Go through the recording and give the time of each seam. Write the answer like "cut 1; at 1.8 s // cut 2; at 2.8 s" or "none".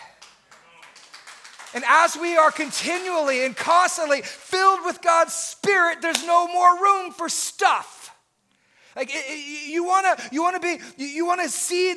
none